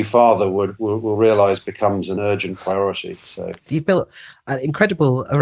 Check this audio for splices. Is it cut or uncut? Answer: cut